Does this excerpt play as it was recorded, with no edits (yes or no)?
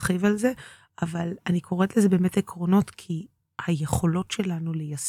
yes